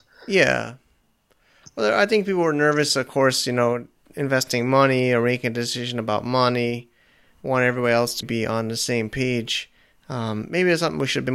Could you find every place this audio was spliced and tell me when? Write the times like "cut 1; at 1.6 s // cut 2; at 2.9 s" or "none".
cut 1; at 8.2 s